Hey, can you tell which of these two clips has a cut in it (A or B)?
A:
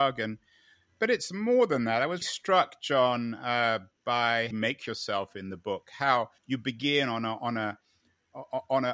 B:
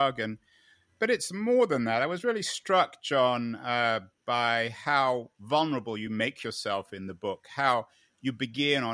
A